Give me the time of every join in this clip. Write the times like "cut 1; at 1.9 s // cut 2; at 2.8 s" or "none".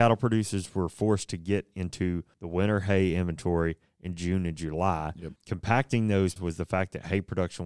cut 1; at 2.3 s // cut 2; at 5.4 s // cut 3; at 6.4 s